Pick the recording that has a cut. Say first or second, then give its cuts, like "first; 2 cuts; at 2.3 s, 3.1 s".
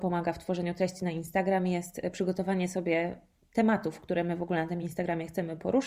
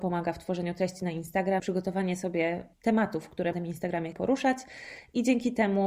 second; 4 cuts; at 1.6 s, 2.7 s, 3.5 s, 4.1 s